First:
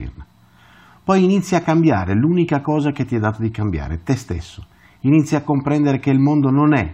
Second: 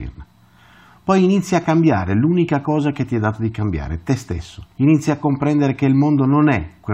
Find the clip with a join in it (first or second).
second